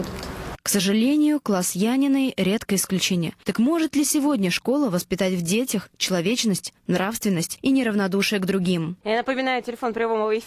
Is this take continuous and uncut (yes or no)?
no